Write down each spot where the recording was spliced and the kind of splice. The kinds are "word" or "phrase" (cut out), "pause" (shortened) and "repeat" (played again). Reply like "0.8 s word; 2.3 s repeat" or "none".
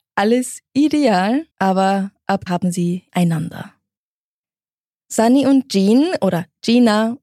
1.5 s pause; 2.5 s word; 3.1 s word